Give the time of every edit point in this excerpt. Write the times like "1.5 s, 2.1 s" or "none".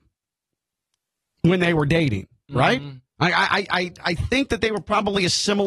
3.1 s

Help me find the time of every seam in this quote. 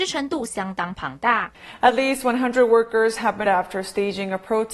3.5 s

